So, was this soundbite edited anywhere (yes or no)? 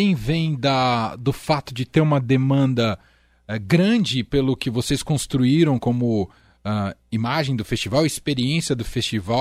no